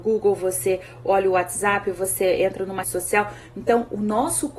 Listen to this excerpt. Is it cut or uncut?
cut